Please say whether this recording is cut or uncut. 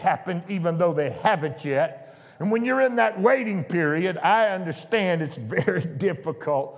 uncut